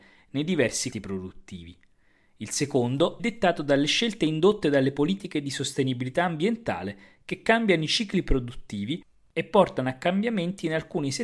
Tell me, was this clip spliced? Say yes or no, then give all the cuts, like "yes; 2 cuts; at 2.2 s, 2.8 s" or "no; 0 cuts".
yes; 2 cuts; at 0.9 s, 3.2 s